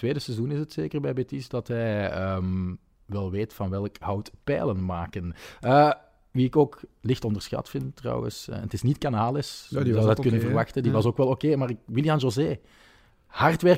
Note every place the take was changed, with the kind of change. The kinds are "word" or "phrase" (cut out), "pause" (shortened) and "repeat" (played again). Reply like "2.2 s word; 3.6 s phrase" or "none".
none